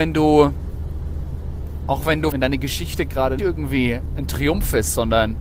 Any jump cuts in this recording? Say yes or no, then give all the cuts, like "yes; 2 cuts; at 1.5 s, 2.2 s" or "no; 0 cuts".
yes; 2 cuts; at 2.3 s, 3.4 s